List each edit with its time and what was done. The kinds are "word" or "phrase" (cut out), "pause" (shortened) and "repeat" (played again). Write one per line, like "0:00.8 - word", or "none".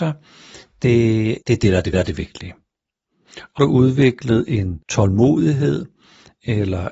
0:01.4 - pause
0:01.9 - repeat
0:03.6 - phrase
0:04.8 - pause